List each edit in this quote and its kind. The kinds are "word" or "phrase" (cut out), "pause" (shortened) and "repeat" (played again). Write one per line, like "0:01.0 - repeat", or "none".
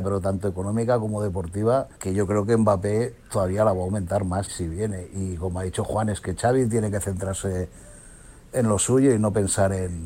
0:01.9 - pause
0:04.5 - word